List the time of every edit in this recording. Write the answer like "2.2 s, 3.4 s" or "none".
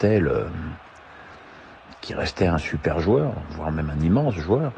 none